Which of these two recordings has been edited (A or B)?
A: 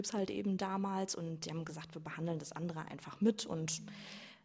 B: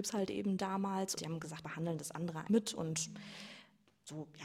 B